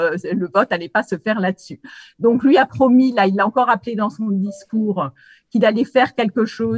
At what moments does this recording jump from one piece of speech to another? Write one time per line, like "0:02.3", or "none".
none